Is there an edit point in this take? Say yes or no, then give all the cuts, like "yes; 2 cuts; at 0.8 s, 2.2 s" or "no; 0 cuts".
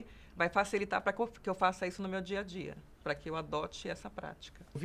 no; 0 cuts